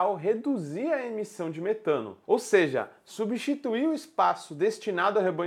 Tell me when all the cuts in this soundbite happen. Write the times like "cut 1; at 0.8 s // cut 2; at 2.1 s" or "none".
cut 1; at 2.2 s